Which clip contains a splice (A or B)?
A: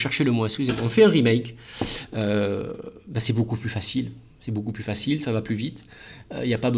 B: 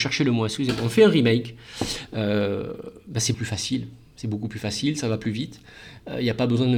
B